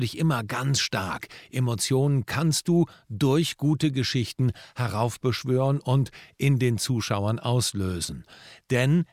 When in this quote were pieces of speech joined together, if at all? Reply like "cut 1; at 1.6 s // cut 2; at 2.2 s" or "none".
none